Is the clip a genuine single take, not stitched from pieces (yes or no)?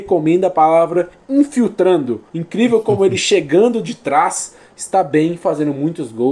no